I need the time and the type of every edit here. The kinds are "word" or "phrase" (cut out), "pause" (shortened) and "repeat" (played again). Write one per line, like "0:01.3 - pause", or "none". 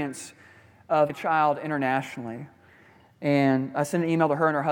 0:01.1 - word